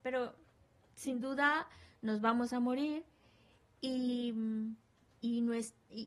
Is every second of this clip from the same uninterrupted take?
yes; 0 cuts

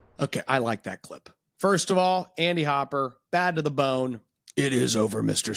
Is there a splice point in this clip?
no; 0 cuts

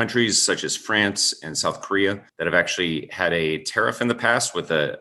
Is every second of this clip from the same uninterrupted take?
no; 1 cut; at 2.3 s

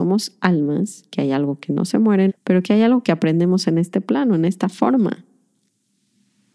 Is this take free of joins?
no; 1 cut; at 2.3 s

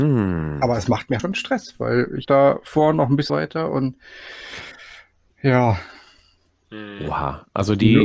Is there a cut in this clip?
yes; 3 cuts; at 1.2 s, 2.2 s, 3.3 s

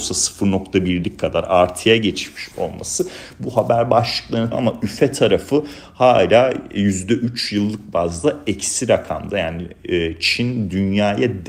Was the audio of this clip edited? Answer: yes; 1 cut; at 4.5 s

